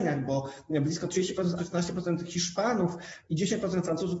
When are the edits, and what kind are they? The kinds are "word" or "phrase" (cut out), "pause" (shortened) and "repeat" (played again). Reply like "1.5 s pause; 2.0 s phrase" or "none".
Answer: 1.6 s word